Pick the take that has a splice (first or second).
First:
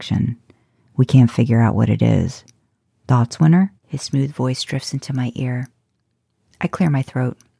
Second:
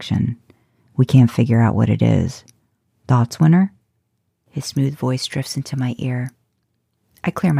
first